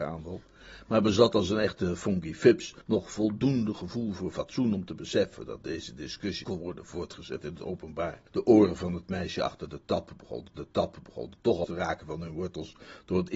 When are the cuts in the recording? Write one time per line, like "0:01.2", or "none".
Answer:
0:02.8
0:06.4
0:08.3
0:10.6
0:11.6